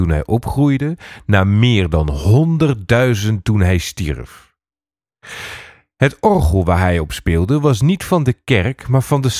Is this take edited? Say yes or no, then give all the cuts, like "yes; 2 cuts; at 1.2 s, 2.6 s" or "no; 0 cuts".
no; 0 cuts